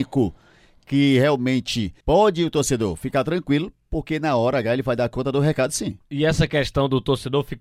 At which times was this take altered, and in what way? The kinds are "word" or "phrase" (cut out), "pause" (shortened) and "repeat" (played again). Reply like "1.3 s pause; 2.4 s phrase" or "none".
2.0 s pause

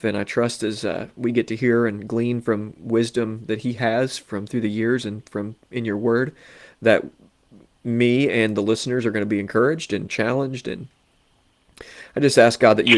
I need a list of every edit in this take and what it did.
none

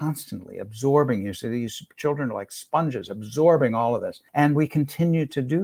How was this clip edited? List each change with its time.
4.3 s pause

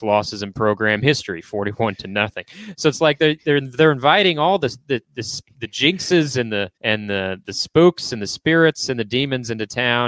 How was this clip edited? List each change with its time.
6.7 s pause

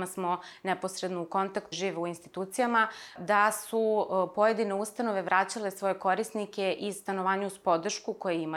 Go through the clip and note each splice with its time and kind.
1.7 s word

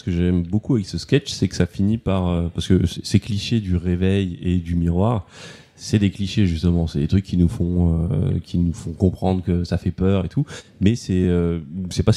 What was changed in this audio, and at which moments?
none

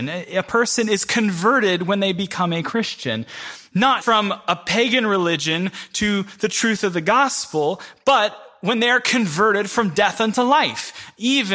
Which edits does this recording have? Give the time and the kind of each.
4.0 s word

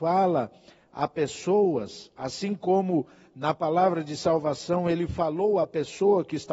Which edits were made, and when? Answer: none

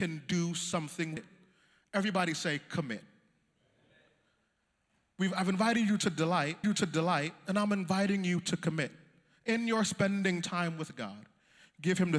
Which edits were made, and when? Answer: 1.2 s word; 6.6 s repeat

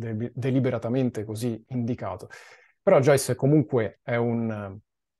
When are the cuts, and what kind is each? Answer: none

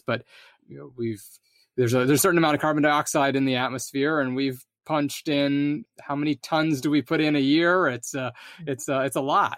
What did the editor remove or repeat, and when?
none

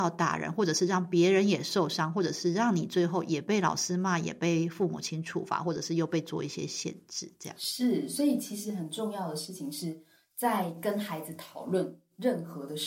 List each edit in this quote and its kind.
none

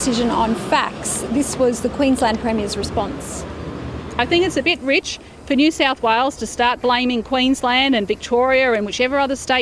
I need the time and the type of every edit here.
none

